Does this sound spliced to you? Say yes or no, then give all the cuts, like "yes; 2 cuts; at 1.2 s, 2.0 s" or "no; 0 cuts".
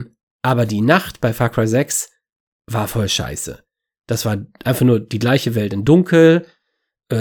no; 0 cuts